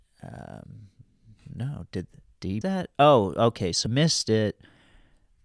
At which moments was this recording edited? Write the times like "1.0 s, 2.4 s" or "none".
2.6 s, 3.9 s